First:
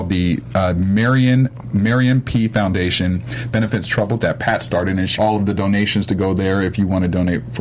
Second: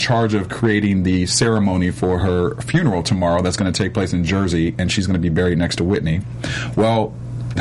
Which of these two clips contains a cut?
first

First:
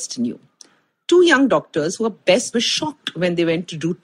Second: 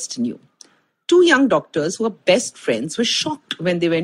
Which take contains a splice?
first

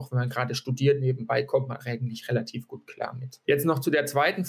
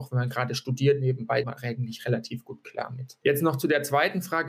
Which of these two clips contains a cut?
second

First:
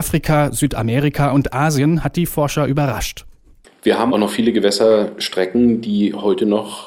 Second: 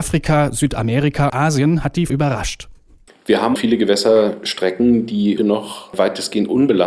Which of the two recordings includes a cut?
second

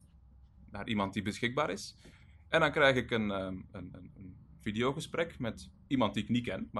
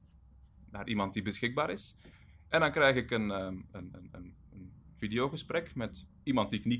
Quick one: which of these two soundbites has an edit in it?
first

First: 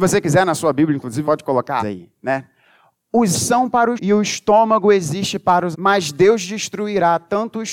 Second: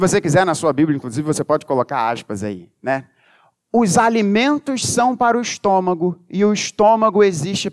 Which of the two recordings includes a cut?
first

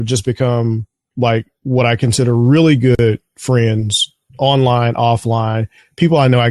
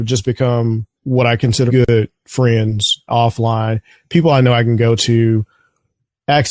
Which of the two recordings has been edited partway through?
second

